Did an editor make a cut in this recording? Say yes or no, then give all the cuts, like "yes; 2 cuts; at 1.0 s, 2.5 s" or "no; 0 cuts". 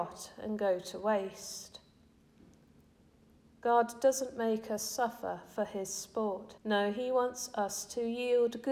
yes; 1 cut; at 6.6 s